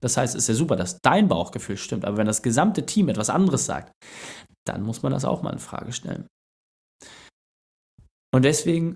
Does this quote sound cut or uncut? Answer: uncut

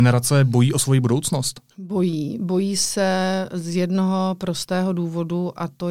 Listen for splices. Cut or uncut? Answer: cut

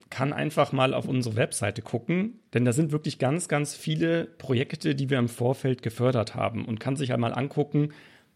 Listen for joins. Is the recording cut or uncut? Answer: uncut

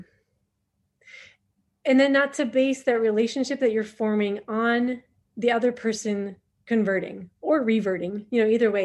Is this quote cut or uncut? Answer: uncut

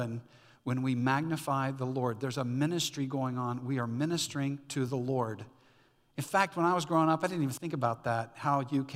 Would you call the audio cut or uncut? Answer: uncut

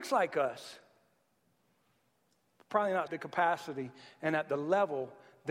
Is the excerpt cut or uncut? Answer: cut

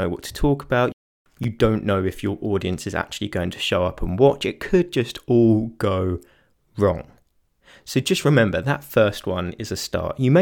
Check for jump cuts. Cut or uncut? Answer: uncut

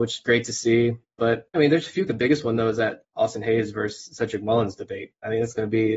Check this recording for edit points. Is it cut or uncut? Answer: cut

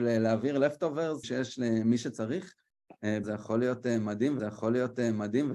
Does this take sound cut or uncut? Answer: cut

